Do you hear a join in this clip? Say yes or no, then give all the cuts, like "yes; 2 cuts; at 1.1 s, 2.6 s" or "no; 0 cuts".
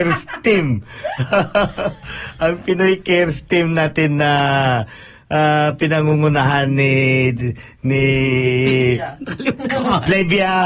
no; 0 cuts